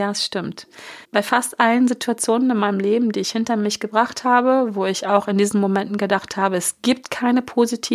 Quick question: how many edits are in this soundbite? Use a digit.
1